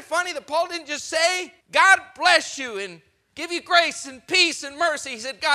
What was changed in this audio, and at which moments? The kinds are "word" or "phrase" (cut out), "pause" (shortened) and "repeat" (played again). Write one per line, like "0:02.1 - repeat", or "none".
0:01.6 - pause